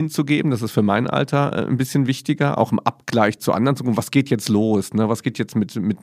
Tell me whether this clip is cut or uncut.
uncut